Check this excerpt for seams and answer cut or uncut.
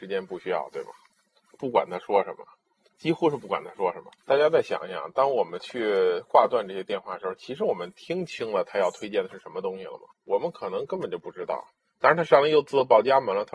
cut